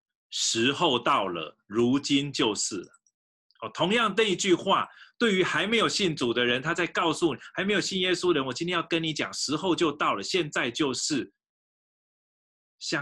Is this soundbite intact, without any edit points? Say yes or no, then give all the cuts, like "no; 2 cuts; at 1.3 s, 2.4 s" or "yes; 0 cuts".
yes; 0 cuts